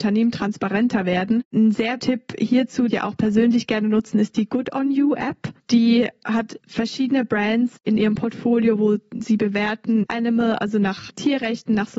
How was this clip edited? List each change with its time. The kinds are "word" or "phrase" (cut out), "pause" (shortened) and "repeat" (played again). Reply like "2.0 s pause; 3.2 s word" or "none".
2.0 s word; 2.9 s word; 6.6 s pause; 10.0 s word